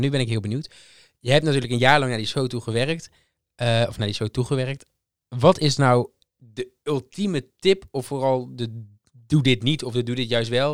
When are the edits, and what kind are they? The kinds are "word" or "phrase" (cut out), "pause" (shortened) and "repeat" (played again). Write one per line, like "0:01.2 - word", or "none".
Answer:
none